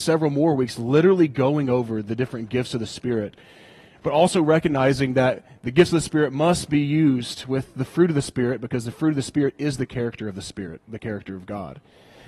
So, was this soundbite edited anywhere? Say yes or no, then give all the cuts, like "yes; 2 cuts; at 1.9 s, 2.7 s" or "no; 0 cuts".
no; 0 cuts